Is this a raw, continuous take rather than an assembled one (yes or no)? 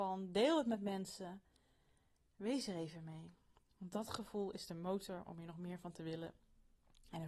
yes